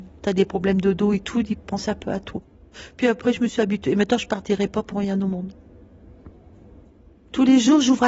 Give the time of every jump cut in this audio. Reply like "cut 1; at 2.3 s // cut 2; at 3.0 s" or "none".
none